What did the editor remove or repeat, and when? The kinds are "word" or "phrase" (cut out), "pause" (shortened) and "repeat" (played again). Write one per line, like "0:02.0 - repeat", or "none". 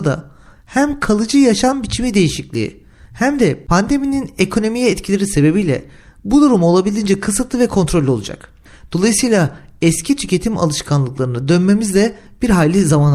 none